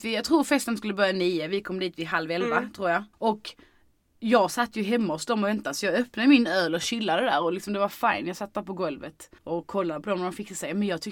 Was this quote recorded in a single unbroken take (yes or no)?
no